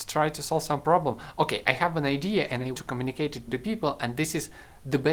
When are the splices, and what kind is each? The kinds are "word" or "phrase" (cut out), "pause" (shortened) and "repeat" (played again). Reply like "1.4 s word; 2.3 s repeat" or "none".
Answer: 2.7 s word; 3.5 s word